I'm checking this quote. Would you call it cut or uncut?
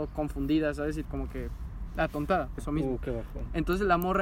cut